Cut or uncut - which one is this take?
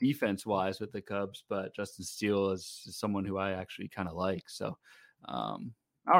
uncut